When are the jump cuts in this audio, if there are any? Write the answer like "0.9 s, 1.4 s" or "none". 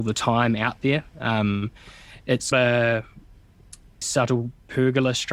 1.1 s, 2.5 s, 4.0 s